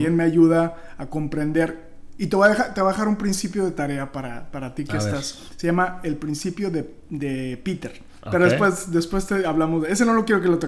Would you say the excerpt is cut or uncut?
uncut